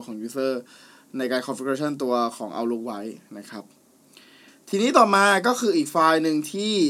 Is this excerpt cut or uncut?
uncut